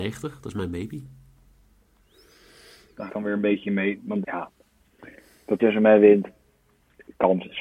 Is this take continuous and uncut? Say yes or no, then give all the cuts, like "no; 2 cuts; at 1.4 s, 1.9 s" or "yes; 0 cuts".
no; 3 cuts; at 3.1 s, 4.2 s, 5.6 s